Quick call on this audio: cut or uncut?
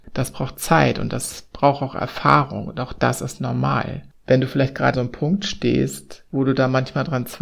cut